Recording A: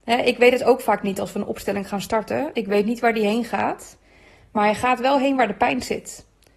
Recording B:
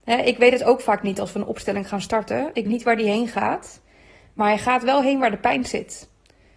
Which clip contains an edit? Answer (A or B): B